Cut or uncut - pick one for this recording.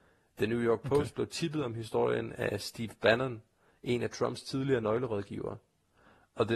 uncut